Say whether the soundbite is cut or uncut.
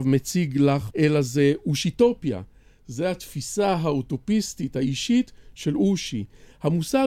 cut